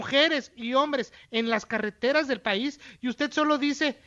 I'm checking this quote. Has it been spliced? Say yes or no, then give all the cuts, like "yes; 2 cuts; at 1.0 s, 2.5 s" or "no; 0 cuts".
no; 0 cuts